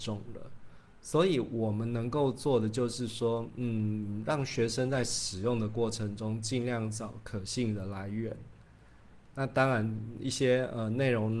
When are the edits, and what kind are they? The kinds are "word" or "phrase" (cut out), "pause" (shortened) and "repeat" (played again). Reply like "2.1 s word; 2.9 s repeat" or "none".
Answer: none